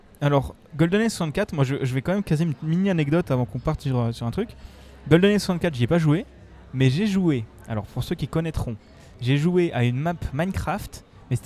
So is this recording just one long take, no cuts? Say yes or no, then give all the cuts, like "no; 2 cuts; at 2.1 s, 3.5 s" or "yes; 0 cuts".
yes; 0 cuts